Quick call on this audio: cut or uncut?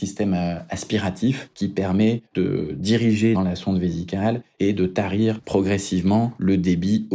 cut